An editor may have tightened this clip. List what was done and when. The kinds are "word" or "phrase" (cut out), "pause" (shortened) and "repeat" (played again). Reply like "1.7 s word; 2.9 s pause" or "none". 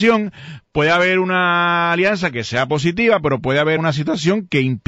3.8 s word